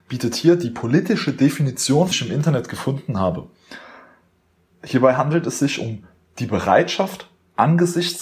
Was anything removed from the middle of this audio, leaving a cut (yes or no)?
yes